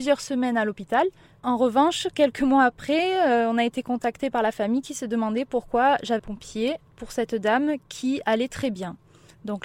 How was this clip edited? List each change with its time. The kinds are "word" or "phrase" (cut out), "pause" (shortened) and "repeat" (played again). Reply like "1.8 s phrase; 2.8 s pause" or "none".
1.3 s pause; 6.2 s phrase